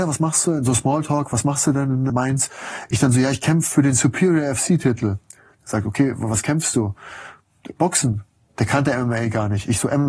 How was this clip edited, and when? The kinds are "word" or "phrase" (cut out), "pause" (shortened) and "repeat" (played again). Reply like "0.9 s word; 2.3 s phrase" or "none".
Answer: 2.1 s word